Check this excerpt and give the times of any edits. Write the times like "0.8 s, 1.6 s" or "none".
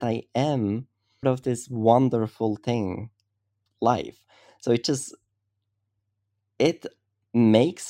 1.2 s, 3.7 s